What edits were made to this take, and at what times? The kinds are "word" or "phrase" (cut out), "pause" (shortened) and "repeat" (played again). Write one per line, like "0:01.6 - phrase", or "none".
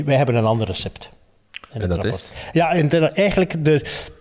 none